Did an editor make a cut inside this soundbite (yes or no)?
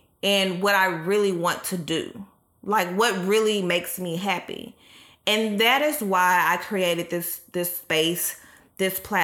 no